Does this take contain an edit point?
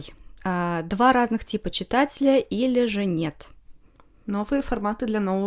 no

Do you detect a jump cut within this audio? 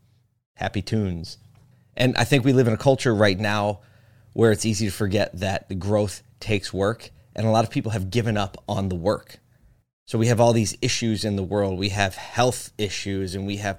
no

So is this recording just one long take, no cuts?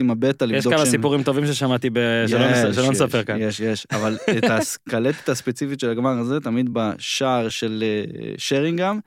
yes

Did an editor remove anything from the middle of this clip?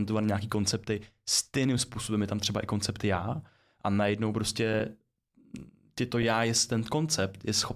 no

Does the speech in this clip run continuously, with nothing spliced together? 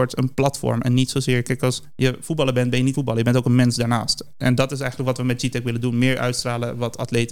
no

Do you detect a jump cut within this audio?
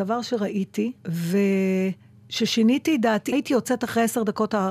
yes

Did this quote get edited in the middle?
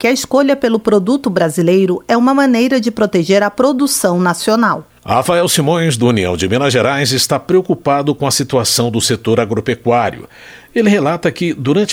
yes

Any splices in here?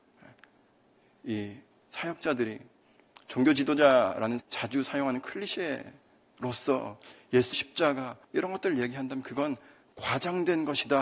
yes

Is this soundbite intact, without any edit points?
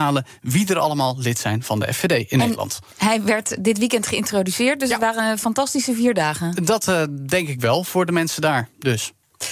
yes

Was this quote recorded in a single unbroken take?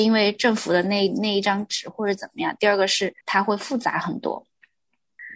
no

